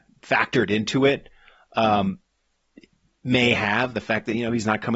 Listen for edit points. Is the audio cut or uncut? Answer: uncut